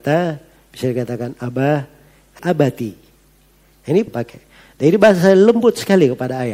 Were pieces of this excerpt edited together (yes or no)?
yes